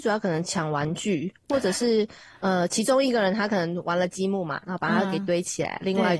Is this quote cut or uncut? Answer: uncut